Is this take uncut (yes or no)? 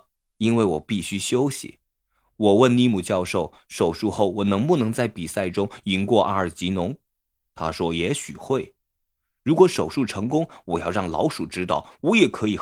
yes